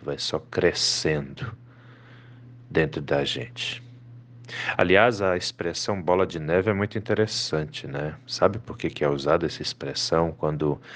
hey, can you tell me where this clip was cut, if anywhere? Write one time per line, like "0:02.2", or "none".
none